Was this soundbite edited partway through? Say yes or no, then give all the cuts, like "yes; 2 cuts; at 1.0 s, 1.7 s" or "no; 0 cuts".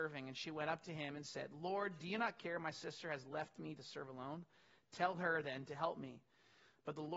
no; 0 cuts